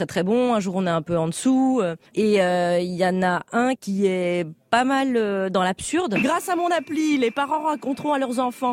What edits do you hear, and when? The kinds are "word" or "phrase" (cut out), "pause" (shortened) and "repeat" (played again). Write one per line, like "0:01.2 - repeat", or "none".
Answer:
0:02.1 - pause